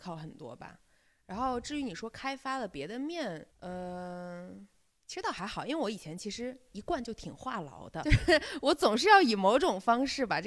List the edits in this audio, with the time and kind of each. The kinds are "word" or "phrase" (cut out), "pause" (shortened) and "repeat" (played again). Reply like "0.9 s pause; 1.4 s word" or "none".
3.5 s pause; 8.0 s word